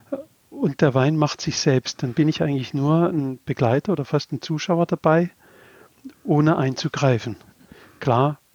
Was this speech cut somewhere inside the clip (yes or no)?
no